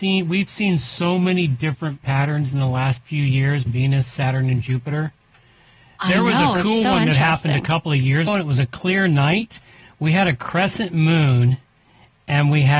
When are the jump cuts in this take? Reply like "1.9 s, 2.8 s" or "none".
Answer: 3.7 s, 8.3 s